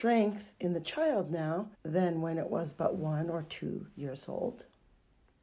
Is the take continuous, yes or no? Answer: no